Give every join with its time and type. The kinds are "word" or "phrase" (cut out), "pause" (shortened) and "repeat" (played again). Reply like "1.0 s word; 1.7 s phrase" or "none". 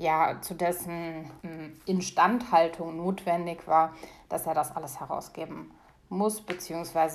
1.4 s pause